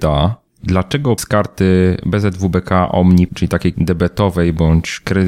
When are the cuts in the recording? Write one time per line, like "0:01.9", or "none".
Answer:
0:01.2
0:03.3
0:03.7

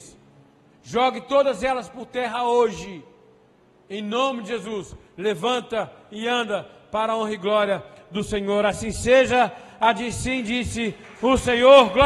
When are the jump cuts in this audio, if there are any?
none

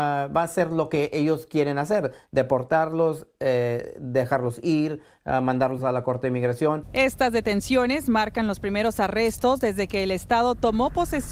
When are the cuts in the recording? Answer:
none

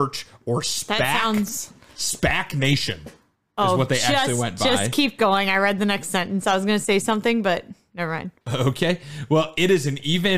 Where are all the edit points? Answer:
0:08.4

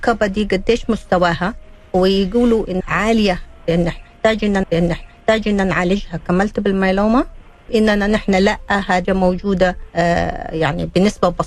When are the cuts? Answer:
0:02.8
0:04.6
0:07.7
0:09.0
0:09.9

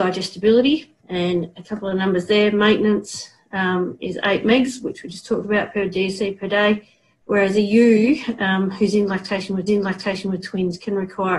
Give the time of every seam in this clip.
0:01.0
0:09.7

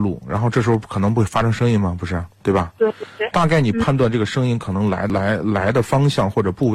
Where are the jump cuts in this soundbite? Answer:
0:02.3

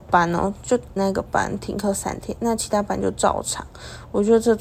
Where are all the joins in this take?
0:01.0

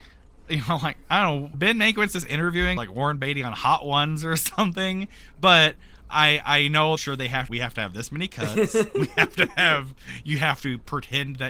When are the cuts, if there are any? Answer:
0:01.5
0:02.8
0:06.1
0:07.0
0:07.5

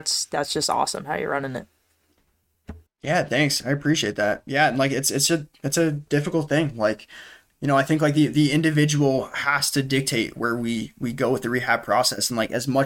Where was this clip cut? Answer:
0:10.3

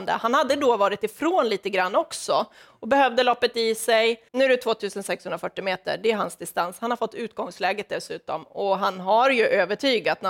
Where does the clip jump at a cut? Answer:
0:04.3

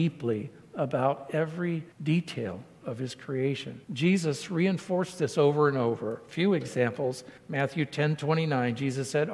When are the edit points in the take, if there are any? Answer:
0:01.9
0:03.8
0:07.4

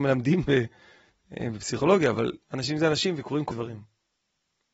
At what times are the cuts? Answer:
0:02.4
0:03.5

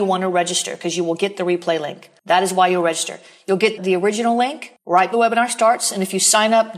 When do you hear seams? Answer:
0:03.8
0:05.1

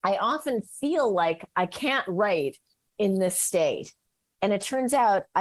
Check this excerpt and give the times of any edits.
none

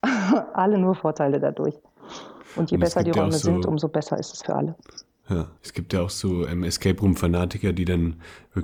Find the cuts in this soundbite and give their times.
0:04.4
0:05.6

